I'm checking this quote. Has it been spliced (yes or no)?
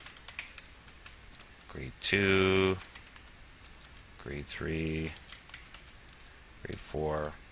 no